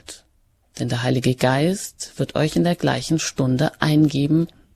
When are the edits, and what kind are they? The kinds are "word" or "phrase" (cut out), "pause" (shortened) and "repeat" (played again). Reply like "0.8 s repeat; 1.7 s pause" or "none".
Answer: none